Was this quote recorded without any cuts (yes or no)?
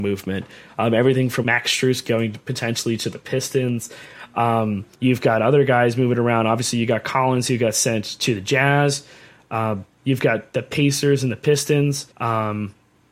no